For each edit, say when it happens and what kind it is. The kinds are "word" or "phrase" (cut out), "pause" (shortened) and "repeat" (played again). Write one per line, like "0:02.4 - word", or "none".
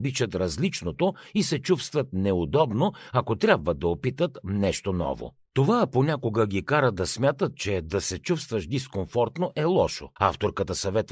0:05.5 - pause
0:10.2 - pause